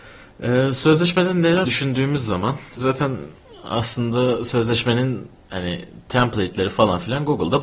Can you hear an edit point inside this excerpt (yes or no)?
yes